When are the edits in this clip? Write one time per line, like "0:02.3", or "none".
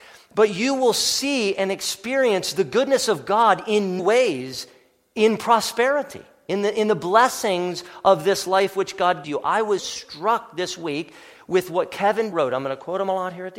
0:04.0
0:09.2
0:09.8
0:12.3